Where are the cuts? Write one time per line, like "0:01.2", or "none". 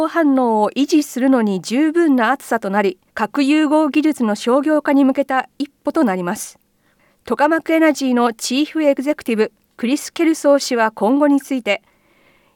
0:03.1